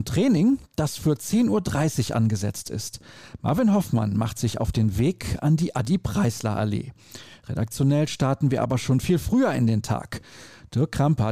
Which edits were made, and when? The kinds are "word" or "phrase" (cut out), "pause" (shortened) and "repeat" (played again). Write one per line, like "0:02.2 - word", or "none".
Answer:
none